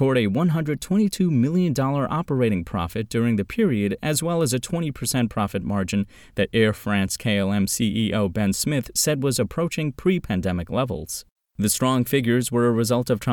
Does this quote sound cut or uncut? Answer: uncut